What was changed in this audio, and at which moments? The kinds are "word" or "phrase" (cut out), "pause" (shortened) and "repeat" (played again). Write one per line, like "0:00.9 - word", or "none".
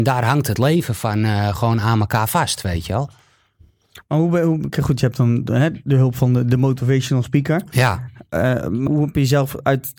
0:08.9 - word